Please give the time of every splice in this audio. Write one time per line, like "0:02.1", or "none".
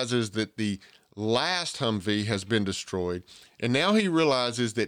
none